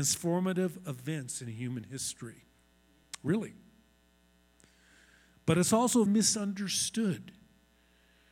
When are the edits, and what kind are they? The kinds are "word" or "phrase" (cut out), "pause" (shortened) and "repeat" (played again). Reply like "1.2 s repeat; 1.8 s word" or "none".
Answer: 6.1 s word